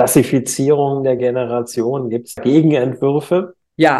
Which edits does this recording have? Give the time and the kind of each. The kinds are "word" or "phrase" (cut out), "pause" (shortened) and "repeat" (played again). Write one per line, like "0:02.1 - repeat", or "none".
none